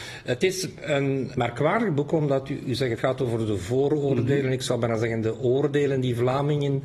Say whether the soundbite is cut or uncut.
cut